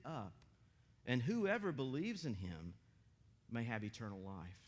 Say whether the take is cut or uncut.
uncut